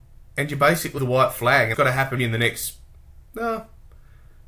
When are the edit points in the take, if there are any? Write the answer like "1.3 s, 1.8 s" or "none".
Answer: 1.0 s, 1.7 s, 2.2 s